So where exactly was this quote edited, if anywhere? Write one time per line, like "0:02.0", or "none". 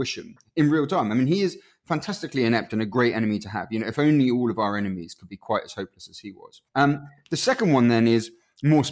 0:06.7